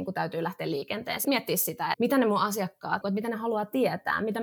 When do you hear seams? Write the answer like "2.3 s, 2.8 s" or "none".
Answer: 1.2 s, 1.9 s, 3.0 s